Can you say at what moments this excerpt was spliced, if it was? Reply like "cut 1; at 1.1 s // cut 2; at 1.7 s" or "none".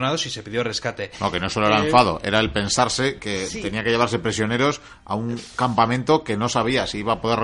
none